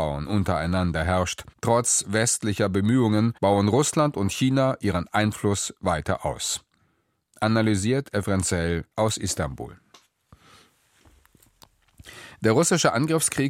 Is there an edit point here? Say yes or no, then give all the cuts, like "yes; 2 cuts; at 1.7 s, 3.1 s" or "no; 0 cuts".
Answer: yes; 3 cuts; at 1.5 s, 3.4 s, 8.9 s